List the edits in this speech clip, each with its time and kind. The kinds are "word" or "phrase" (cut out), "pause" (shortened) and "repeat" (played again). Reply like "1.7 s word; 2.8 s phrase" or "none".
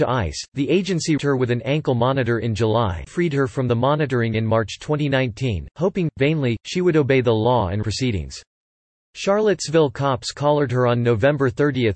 1.2 s word; 3.1 s word; 7.8 s phrase